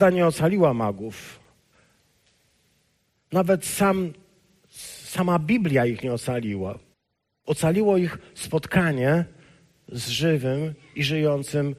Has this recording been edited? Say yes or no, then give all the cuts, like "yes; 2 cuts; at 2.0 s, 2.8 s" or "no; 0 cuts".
yes; 1 cut; at 6.9 s